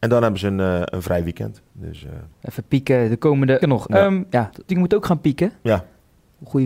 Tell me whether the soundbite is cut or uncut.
cut